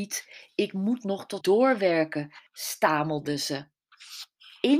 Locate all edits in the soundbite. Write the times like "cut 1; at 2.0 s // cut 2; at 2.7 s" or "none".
cut 1; at 1.4 s // cut 2; at 2.5 s